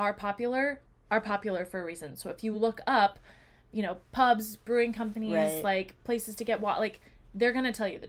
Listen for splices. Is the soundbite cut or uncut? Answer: uncut